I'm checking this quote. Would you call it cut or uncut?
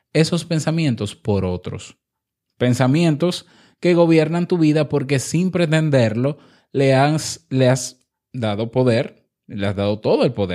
uncut